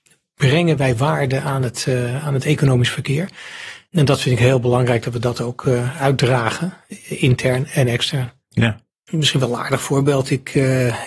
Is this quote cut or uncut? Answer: uncut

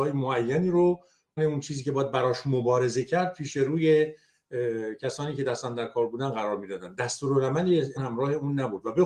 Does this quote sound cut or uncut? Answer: cut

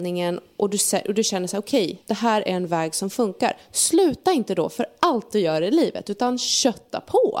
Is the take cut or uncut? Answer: cut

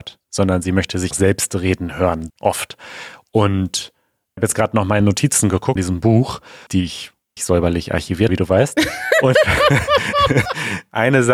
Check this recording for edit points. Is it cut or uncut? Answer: cut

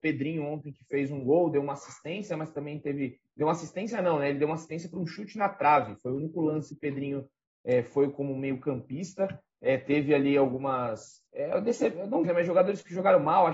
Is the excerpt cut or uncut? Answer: cut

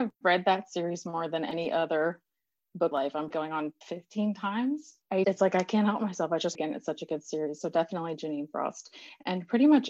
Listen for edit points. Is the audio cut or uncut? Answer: cut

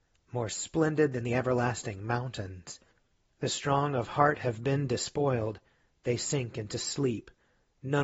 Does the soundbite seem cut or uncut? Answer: uncut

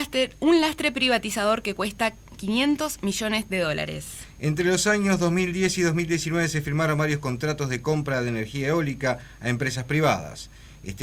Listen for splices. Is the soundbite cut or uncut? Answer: uncut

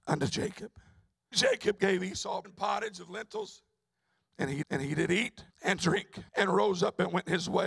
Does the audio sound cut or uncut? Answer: cut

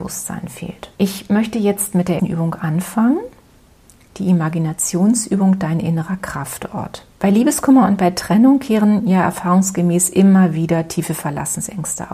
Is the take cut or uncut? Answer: cut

